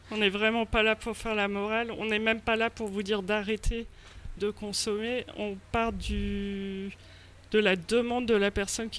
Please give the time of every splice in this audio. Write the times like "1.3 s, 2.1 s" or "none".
4.4 s